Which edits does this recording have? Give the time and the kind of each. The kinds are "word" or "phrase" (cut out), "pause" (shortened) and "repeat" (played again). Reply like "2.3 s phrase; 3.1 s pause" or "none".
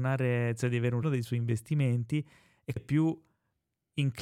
1.0 s word; 2.8 s word